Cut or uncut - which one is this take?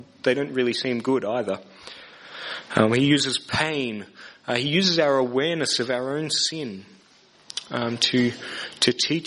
uncut